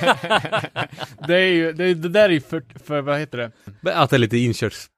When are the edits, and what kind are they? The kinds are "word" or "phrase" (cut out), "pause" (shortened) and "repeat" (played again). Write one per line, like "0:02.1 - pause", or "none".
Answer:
0:02.8 - word

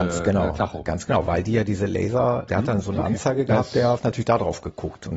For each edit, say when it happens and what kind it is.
0:02.5 - word
0:04.0 - phrase

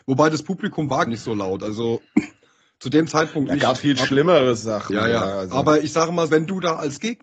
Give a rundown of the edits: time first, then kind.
0:01.1 - word
0:03.8 - word
0:06.3 - word

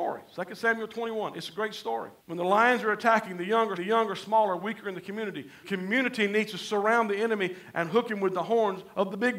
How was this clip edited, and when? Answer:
0:02.2 - pause
0:03.8 - repeat
0:05.6 - word

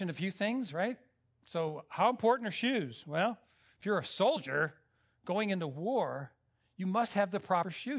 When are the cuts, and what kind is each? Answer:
none

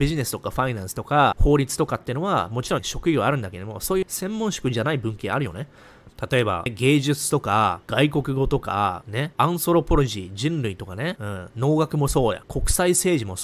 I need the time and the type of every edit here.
none

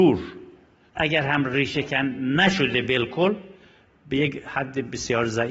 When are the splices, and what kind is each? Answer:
none

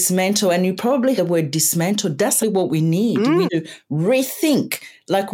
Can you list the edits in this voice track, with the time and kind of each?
0:01.2 - word
0:02.4 - word
0:03.5 - word

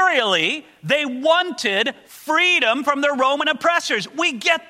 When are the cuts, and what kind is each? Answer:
none

